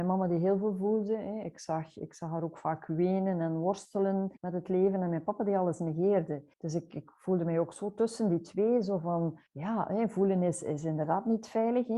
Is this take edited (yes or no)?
yes